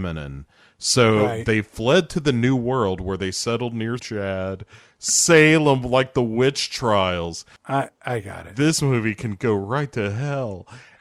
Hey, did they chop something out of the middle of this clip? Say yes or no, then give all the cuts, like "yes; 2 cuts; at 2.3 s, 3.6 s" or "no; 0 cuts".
yes; 1 cut; at 4.0 s